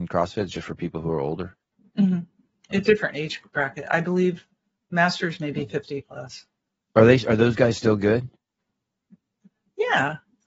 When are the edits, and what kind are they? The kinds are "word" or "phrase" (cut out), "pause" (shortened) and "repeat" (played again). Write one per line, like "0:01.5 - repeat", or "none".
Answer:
none